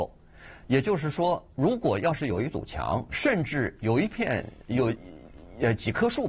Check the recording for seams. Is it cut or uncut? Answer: cut